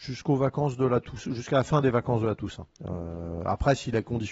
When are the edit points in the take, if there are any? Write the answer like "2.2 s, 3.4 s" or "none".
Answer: 2.8 s